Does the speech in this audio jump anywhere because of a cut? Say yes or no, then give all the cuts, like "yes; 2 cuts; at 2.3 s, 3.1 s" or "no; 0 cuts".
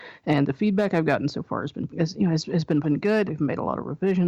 yes; 3 cuts; at 1.9 s, 2.8 s, 3.3 s